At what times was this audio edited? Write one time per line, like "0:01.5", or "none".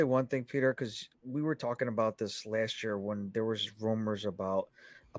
0:01.1